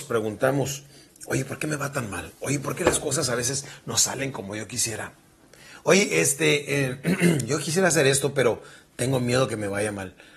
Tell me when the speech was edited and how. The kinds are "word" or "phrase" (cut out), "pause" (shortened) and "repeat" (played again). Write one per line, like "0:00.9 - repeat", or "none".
none